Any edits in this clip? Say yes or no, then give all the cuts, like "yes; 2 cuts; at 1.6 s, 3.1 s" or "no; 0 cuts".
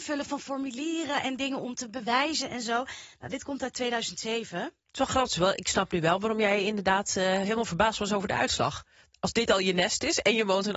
no; 0 cuts